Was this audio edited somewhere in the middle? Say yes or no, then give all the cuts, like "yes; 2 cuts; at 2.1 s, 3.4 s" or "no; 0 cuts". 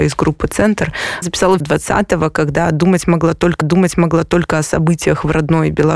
yes; 3 cuts; at 1.2 s, 1.6 s, 3.6 s